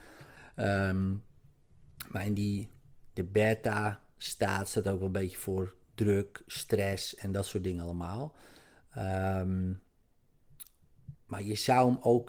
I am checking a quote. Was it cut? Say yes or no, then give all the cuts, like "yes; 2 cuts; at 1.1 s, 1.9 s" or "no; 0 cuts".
yes; 1 cut; at 11.1 s